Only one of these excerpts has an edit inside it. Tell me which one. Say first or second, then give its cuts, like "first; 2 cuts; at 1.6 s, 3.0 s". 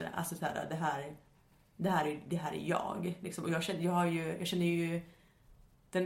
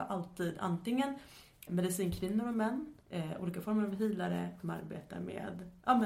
second; 3 cuts; at 1.7 s, 3.0 s, 4.6 s